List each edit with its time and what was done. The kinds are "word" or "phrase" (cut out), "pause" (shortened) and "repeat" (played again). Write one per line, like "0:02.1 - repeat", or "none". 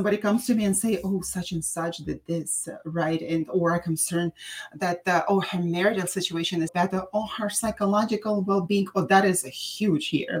0:06.7 - word